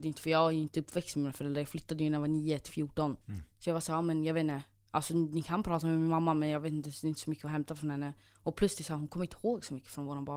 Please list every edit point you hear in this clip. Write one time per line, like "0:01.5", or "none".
0:03.2